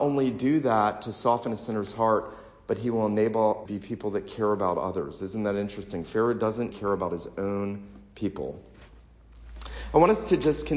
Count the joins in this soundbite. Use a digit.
2